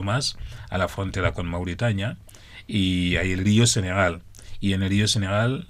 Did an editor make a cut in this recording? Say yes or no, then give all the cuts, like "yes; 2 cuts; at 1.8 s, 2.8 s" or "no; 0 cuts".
no; 0 cuts